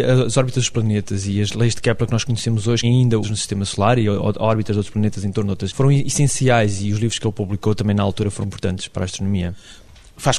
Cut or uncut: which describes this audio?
cut